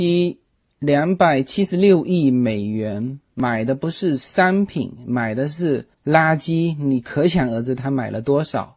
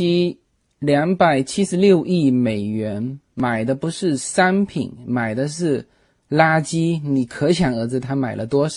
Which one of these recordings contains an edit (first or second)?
first